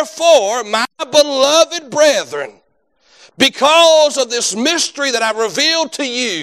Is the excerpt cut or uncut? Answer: uncut